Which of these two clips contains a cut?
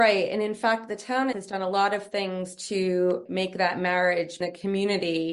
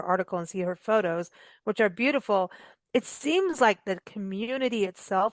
first; 3 cuts; at 1.3 s, 3.3 s, 4.4 s

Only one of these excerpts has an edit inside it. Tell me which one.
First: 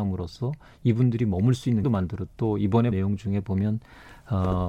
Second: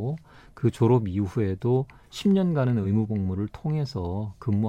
first; 3 cuts; at 1.8 s, 2.3 s, 2.9 s

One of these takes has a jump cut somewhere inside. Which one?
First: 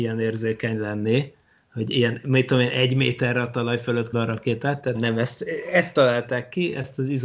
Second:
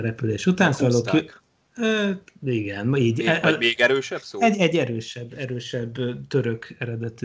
first; 2 cuts; at 4.1 s, 4.9 s

